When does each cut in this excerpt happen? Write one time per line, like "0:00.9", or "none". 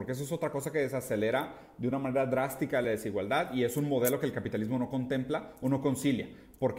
none

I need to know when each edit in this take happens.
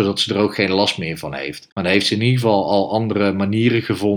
0:01.7

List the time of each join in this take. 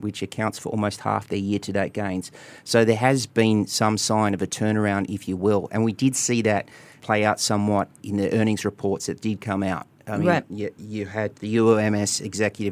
0:11.3

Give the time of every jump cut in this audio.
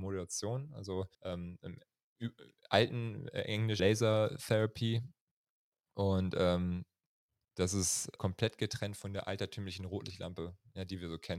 0:01.1
0:03.8
0:08.2

